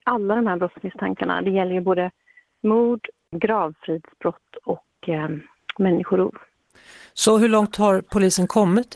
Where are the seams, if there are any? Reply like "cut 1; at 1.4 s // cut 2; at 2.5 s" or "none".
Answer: none